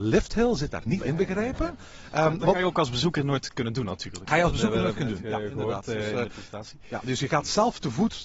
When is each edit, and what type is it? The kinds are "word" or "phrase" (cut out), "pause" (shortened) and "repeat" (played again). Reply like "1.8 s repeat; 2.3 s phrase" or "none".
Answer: none